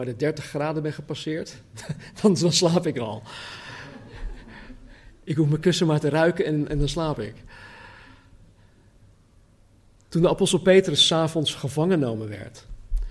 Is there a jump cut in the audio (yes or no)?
no